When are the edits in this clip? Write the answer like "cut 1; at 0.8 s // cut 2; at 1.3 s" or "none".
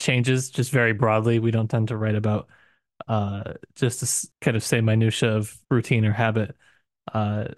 cut 1; at 4.3 s // cut 2; at 5.6 s